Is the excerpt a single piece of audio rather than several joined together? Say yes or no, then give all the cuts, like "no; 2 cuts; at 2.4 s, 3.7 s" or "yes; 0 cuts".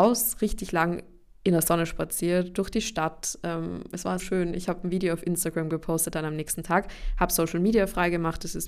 no; 1 cut; at 4.2 s